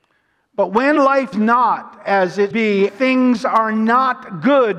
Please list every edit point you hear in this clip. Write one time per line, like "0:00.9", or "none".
0:01.3
0:02.5
0:02.9